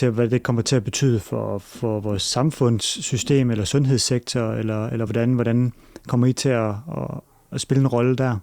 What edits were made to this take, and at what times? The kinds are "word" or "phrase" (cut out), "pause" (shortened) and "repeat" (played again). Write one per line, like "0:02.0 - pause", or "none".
none